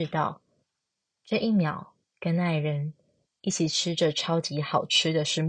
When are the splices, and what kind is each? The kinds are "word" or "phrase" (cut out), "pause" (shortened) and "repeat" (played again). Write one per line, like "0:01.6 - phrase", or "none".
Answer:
none